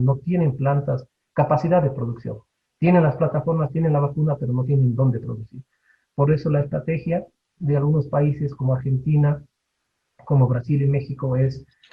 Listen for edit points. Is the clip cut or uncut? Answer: uncut